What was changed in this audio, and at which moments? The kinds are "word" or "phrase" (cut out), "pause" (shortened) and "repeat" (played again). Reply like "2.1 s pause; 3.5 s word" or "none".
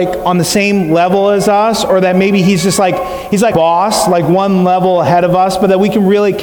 3.5 s word